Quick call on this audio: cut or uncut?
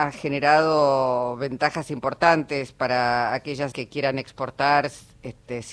cut